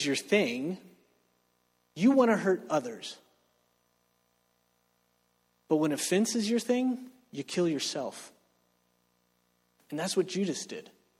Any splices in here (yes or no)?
no